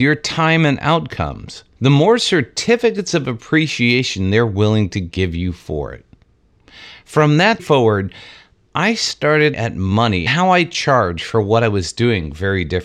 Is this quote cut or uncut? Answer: cut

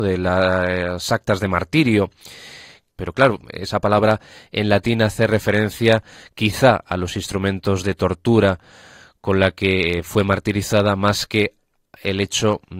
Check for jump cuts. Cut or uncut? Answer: uncut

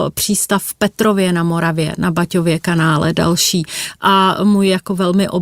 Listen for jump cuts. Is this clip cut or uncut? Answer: uncut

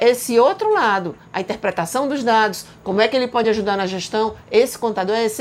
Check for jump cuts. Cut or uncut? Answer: uncut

